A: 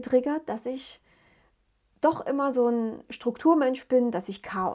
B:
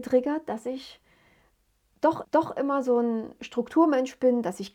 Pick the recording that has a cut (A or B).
B